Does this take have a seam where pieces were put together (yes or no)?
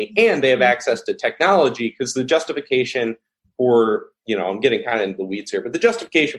no